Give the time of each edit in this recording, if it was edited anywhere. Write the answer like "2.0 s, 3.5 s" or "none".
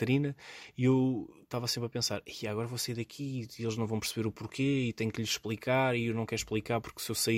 none